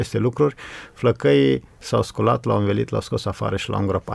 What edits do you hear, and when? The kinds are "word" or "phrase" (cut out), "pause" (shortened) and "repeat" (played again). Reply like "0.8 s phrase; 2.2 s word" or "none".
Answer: none